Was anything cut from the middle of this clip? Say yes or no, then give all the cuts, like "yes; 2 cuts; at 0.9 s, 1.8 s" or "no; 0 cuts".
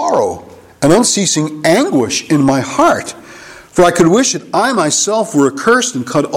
no; 0 cuts